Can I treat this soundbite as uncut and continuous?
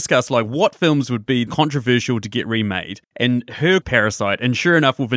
no; 3 cuts; at 1.5 s, 3.1 s, 3.8 s

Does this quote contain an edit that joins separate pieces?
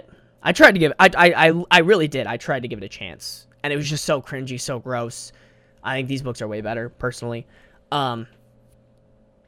no; 0 cuts

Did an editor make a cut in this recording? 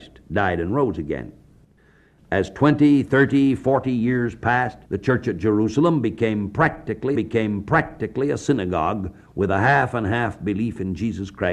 yes; 2 cuts; at 4.8 s, 7.1 s

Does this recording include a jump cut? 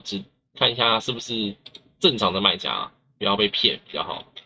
no; 0 cuts

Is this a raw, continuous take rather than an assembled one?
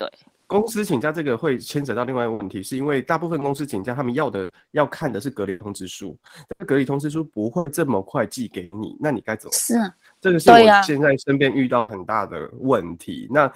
yes; 0 cuts

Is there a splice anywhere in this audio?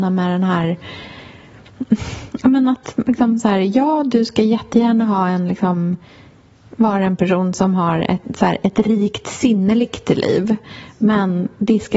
no; 0 cuts

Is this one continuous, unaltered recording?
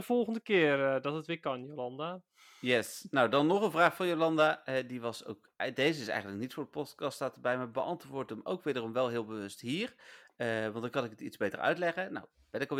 yes; 0 cuts

